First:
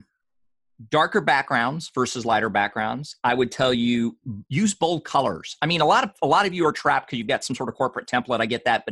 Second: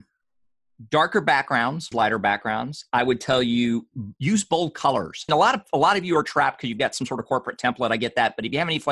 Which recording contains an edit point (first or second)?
second